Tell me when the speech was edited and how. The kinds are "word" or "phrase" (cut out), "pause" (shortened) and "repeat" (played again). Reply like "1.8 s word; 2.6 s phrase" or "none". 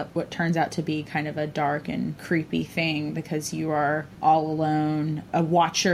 none